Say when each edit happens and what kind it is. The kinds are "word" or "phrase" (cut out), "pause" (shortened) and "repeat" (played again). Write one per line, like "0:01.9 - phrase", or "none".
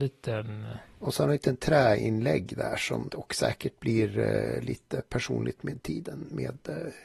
0:03.1 - phrase